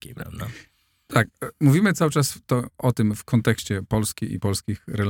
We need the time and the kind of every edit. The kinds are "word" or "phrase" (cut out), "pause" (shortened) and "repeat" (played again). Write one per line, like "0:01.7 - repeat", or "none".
none

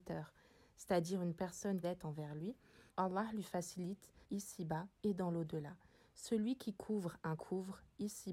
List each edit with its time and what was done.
0:01.8 - phrase
0:02.9 - pause
0:04.2 - pause
0:07.4 - phrase

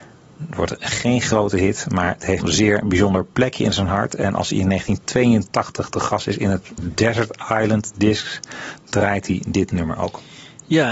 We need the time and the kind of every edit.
0:02.4 - phrase
0:06.8 - word

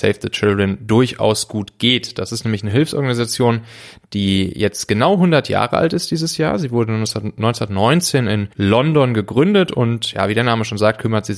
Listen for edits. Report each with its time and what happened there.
0:08.5 - pause

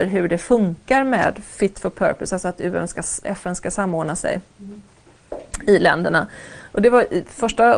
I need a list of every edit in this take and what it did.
0:03.2 - word

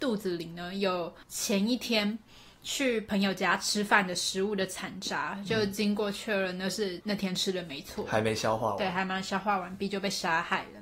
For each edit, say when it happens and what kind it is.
0:01.2 - pause
0:07.0 - word

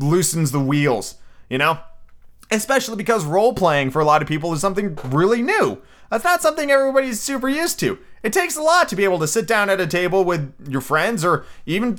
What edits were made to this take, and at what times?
none

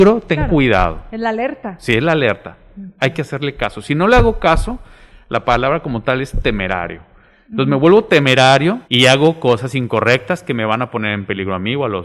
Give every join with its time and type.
0:08.8 - pause

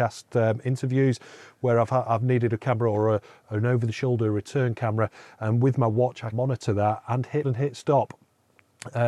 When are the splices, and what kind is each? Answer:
0:02.6 - word
0:06.3 - word
0:07.4 - word

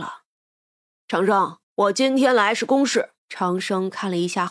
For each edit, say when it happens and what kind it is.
0:01.6 - pause
0:03.2 - pause

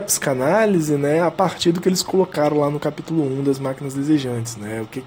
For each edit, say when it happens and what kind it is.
none

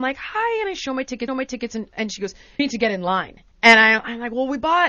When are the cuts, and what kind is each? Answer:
0:01.3 - repeat
0:02.6 - word
0:03.5 - pause

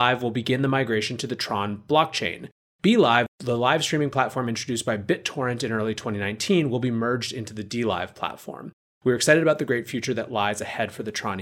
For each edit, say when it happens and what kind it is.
none

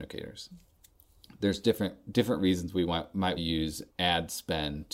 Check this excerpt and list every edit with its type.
0:03.4 - word
0:03.9 - pause

